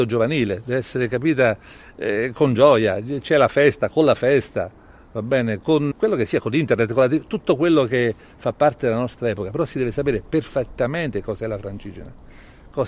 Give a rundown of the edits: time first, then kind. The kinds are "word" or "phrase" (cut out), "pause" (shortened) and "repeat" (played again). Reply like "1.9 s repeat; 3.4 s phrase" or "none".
5.9 s word